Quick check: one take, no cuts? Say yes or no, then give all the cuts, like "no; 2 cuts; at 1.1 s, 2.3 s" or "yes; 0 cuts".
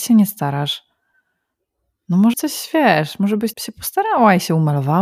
no; 2 cuts; at 2.3 s, 3.5 s